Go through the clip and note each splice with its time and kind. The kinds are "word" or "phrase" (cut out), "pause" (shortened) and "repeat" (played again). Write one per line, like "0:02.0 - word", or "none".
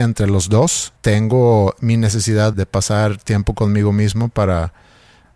0:01.0 - pause
0:02.5 - word